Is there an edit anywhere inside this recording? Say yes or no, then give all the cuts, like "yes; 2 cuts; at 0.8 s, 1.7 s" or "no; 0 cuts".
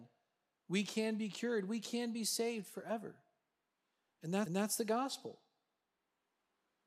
yes; 1 cut; at 4.5 s